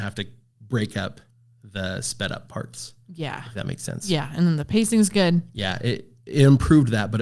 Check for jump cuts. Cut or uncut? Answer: uncut